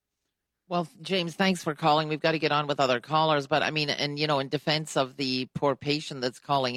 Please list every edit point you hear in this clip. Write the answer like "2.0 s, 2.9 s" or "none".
none

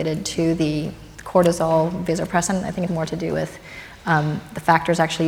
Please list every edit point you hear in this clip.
2.9 s

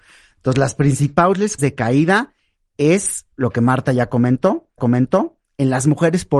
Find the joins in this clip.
1.6 s, 3.3 s, 4.8 s

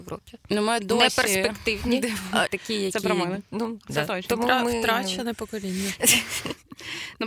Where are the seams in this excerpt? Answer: 2.5 s, 3.4 s

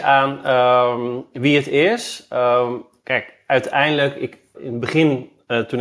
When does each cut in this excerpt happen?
4.5 s

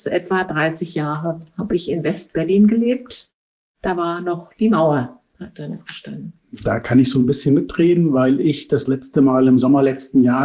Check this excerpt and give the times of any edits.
none

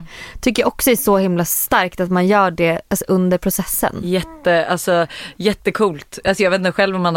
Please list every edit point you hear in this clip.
none

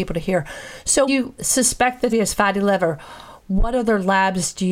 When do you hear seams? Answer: 1.1 s, 2.1 s

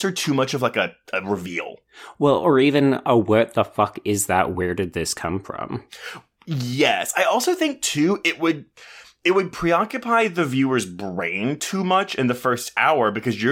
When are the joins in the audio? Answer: none

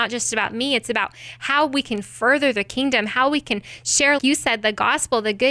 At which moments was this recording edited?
4.2 s

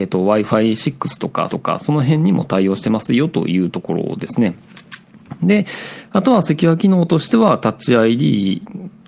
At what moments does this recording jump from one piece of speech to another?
1.5 s

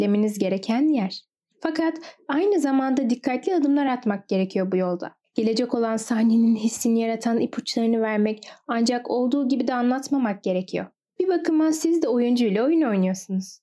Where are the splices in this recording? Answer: none

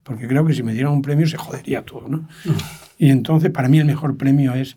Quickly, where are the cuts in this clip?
none

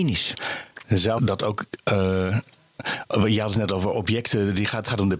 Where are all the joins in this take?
1.2 s

